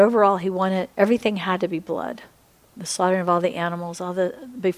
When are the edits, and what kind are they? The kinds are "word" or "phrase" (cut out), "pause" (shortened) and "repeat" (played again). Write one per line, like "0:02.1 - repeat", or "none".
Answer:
0:00.9 - pause
0:02.5 - pause

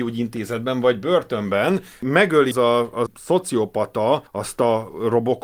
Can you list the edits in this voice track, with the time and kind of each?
0:02.5 - word
0:03.1 - word
0:04.3 - pause

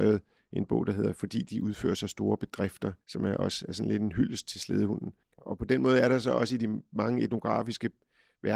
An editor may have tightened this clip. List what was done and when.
0:03.0 - pause
0:05.2 - pause

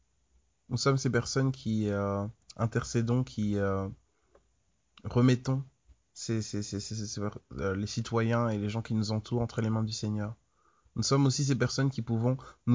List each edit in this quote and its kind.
none

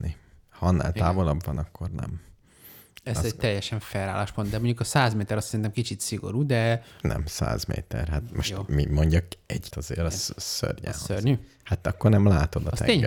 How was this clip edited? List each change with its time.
0:09.7 - word

